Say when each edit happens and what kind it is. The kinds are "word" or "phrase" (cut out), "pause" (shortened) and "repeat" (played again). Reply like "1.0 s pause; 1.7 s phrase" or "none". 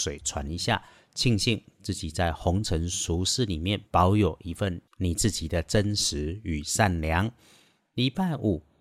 3.9 s pause